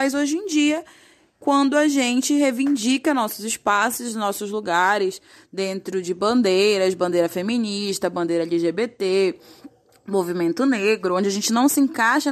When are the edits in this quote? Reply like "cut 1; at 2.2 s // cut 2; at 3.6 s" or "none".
none